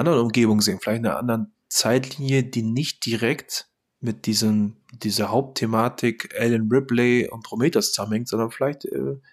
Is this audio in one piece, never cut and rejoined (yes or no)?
yes